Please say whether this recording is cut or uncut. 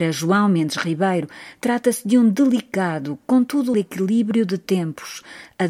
cut